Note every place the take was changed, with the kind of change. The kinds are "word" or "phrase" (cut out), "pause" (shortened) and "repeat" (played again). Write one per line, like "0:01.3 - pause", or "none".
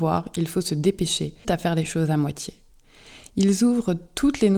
0:01.4 - word